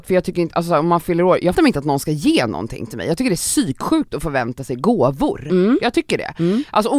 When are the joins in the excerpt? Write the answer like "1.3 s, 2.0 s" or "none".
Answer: 1.5 s